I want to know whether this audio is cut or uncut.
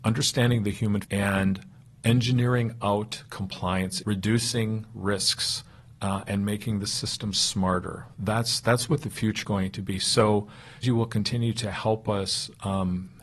cut